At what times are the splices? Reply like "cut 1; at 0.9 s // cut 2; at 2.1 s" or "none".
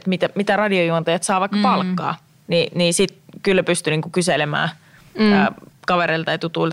none